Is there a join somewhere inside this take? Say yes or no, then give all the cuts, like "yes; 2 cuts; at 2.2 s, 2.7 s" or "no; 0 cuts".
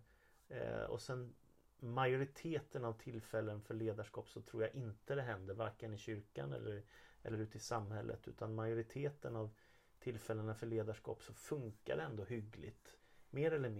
no; 0 cuts